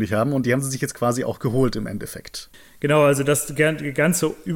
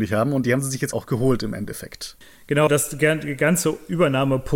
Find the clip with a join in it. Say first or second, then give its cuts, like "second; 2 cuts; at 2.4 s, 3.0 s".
second; 2 cuts; at 0.9 s, 2.7 s